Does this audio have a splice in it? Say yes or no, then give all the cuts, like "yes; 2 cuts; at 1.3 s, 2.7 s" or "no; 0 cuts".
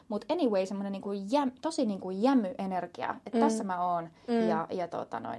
no; 0 cuts